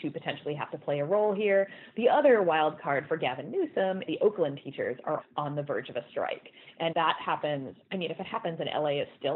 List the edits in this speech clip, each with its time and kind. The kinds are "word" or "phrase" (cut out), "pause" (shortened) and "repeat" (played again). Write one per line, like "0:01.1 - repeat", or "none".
0:04.1 - phrase
0:05.2 - word
0:06.9 - word